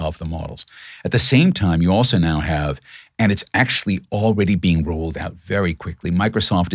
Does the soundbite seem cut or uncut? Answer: uncut